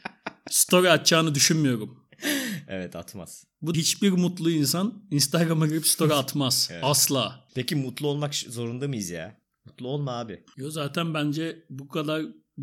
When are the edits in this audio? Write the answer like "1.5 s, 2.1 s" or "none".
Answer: 3.7 s